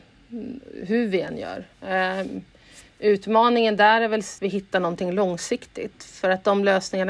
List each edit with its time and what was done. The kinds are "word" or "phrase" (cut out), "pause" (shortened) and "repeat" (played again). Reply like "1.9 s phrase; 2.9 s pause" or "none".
1.7 s pause; 4.4 s word